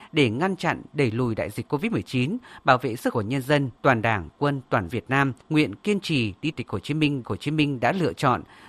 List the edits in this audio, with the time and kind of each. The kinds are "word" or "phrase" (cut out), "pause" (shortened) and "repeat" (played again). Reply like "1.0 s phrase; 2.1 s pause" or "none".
3.1 s phrase; 3.8 s pause; 4.3 s word; 4.9 s word; 5.4 s pause; 6.5 s phrase; 7.2 s repeat

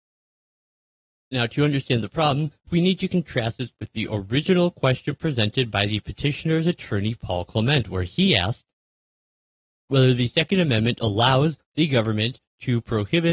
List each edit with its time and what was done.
none

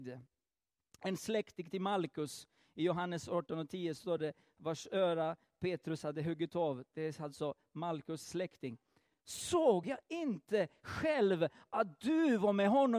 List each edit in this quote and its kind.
none

